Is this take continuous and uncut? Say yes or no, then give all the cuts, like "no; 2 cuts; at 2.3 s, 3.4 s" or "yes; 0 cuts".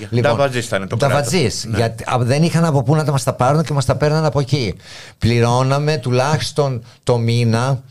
yes; 0 cuts